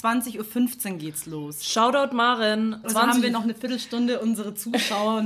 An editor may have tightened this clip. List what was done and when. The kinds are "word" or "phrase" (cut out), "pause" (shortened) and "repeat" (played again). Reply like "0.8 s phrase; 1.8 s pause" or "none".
2.8 s word